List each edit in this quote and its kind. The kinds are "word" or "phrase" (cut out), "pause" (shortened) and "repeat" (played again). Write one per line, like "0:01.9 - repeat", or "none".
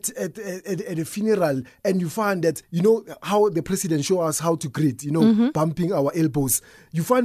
0:02.6 - pause